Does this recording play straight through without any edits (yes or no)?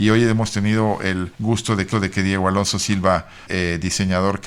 no